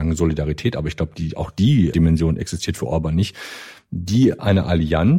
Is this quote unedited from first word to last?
no; 1 cut; at 1.9 s

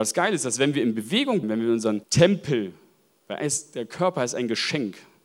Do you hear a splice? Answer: yes; 2 cuts; at 1.4 s, 2.0 s

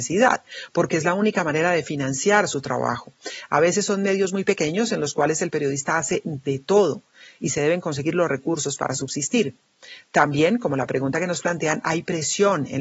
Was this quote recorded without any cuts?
yes; 0 cuts

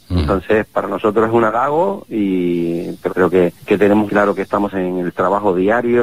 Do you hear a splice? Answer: yes; 4 cuts; at 3.1 s, 3.6 s, 4.1 s, 4.7 s

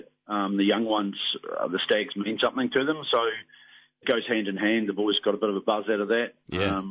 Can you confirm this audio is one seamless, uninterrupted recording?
no; 1 cut; at 4.0 s

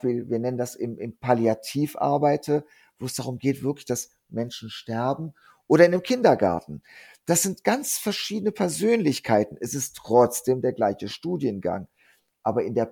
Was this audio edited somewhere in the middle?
no; 0 cuts

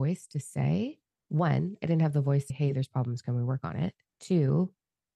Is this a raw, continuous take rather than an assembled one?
no; 3 cuts; at 1.1 s, 2.5 s, 4.1 s

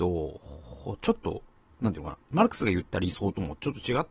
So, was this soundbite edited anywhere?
no; 0 cuts

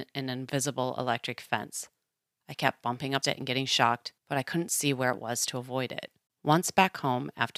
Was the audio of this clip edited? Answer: yes; 3 cuts; at 3.2 s, 4.2 s, 6.3 s

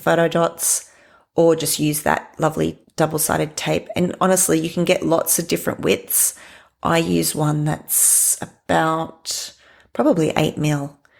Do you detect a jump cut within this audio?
no; 0 cuts

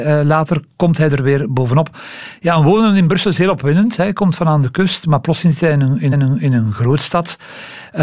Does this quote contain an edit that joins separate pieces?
yes; 1 cut; at 6.1 s

